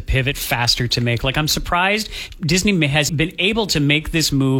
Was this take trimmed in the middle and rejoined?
yes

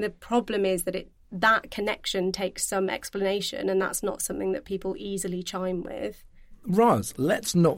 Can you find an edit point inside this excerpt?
no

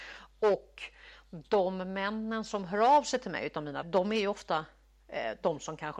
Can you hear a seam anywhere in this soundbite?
yes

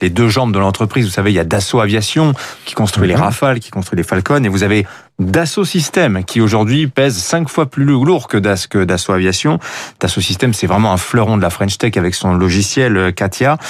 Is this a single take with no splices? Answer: yes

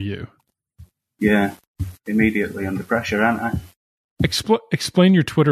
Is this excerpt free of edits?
yes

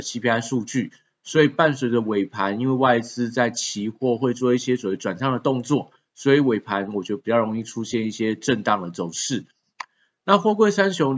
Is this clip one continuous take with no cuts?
yes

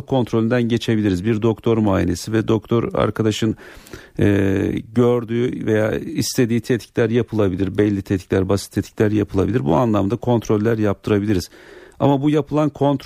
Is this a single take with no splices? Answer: yes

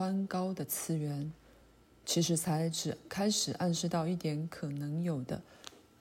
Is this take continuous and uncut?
yes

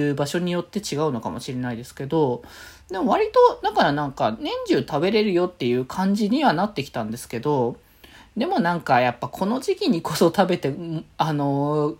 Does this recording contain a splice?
no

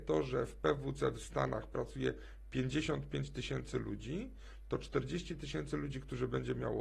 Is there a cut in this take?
no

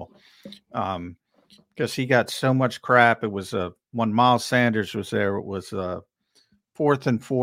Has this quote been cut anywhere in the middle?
no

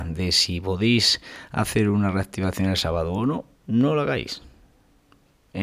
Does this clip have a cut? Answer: no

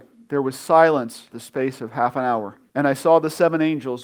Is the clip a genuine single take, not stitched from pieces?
no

